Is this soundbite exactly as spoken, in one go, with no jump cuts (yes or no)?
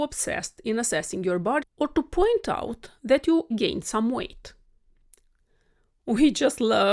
no